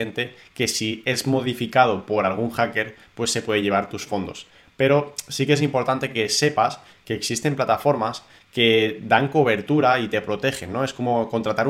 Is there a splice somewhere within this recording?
no; 0 cuts

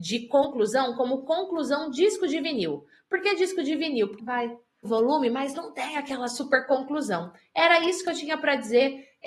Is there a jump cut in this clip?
yes; 2 cuts; at 4.2 s, 4.8 s

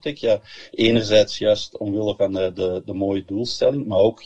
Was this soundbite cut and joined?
no; 0 cuts

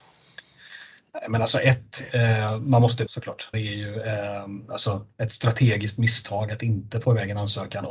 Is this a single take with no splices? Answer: no; 2 cuts; at 3.1 s, 3.5 s

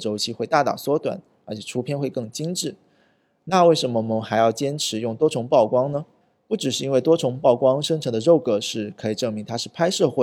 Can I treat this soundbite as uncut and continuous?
yes; 0 cuts

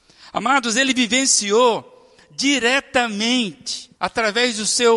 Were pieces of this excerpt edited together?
yes; 1 cut; at 3.9 s

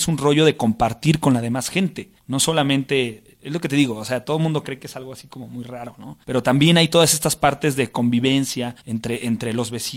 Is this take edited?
yes; 3 cuts; at 2.2 s, 6.2 s, 8.8 s

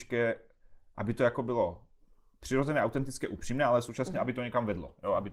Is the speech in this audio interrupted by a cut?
no; 0 cuts

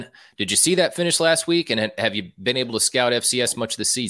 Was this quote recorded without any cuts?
yes; 0 cuts

